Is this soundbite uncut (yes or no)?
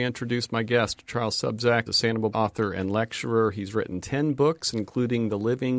no